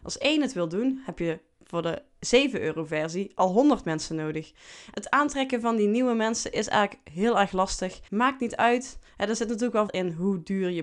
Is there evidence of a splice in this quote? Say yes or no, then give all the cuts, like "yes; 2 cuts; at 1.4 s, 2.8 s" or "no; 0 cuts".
yes; 3 cuts; at 4.9 s, 8.1 s, 9.9 s